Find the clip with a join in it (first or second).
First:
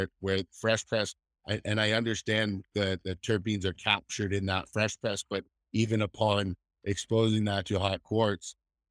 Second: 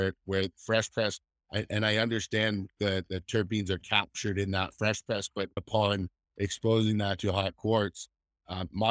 second